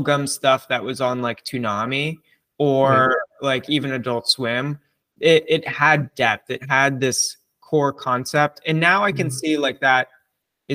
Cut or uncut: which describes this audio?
uncut